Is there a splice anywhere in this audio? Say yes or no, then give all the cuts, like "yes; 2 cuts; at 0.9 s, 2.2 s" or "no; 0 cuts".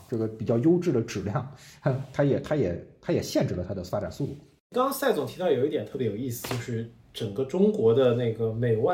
no; 0 cuts